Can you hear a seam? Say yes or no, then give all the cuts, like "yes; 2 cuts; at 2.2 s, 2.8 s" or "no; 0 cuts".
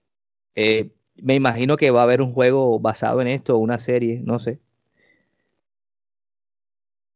no; 0 cuts